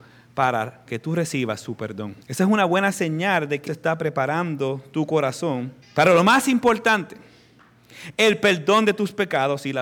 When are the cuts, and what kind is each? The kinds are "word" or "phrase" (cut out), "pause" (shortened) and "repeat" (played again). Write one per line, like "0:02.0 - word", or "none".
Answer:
0:02.2 - pause
0:03.7 - word
0:05.8 - pause